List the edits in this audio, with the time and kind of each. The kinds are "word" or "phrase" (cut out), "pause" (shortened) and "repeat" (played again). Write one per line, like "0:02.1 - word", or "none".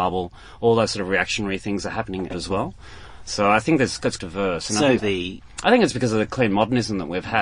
0:02.3 - phrase
0:04.2 - word
0:05.0 - phrase